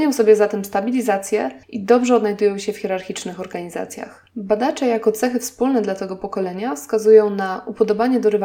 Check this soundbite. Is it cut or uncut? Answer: cut